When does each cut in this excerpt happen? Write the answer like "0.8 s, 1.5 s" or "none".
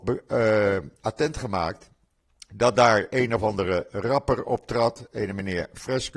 none